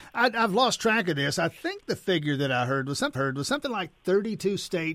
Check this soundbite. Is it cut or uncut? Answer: cut